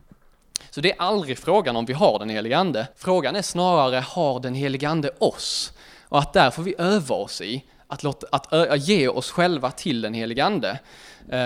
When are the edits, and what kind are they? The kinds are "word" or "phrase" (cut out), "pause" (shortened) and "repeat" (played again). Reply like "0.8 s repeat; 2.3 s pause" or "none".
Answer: 2.9 s pause